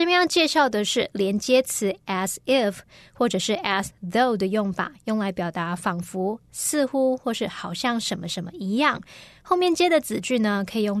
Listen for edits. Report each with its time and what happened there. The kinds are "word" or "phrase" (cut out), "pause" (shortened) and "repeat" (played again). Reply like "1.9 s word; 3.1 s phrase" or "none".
none